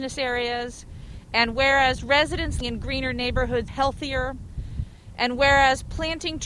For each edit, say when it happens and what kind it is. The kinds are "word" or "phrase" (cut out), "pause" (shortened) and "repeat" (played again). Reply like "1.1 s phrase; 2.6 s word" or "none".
2.6 s word; 3.7 s word